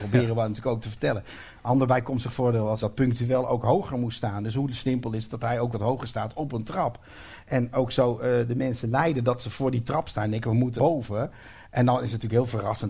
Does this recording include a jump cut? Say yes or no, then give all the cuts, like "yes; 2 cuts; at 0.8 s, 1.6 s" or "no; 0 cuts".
yes; 2 cuts; at 2.8 s, 10.8 s